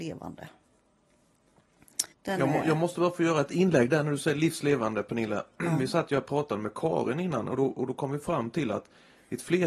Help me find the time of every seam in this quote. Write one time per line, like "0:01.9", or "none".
0:02.1